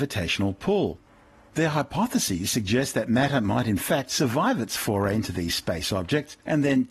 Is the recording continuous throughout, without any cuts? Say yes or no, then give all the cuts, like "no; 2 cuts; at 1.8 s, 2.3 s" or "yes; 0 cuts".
yes; 0 cuts